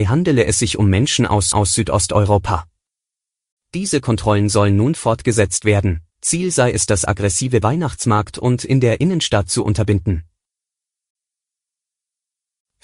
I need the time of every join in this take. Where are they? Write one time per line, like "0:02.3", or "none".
0:01.5
0:06.1
0:07.6